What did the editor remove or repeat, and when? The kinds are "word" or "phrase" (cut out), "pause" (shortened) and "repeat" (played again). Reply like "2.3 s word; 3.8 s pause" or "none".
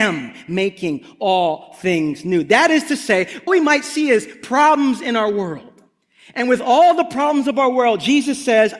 3.5 s word